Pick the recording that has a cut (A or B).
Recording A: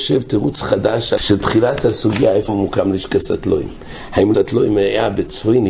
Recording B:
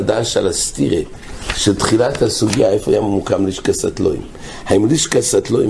A